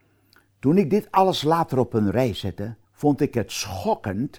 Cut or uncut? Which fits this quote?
cut